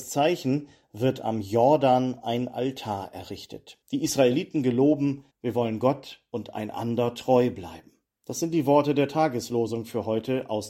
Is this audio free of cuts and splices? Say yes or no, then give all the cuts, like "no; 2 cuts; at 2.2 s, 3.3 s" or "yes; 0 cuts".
no; 3 cuts; at 3.8 s, 5.3 s, 8.0 s